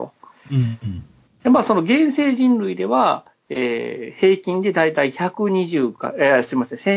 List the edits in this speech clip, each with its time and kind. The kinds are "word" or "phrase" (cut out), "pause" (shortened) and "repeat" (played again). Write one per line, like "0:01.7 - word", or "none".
none